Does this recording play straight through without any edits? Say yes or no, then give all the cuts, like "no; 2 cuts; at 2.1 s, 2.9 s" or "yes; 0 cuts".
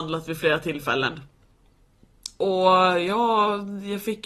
yes; 0 cuts